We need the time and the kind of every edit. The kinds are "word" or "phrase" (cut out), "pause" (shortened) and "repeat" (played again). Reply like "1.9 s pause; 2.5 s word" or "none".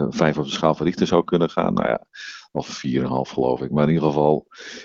none